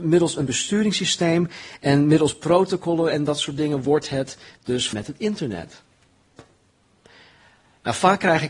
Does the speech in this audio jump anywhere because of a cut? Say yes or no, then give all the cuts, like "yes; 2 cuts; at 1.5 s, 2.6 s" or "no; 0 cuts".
yes; 1 cut; at 4.9 s